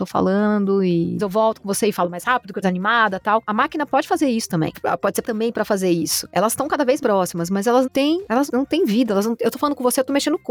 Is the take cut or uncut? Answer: cut